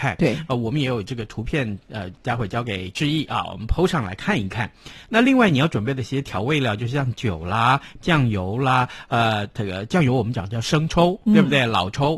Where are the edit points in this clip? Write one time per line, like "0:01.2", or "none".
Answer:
none